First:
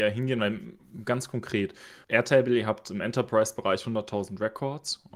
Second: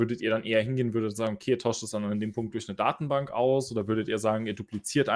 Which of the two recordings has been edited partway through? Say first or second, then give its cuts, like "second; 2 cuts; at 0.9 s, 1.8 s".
first; 1 cut; at 2.0 s